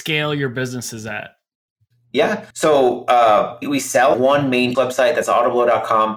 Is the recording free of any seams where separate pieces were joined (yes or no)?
no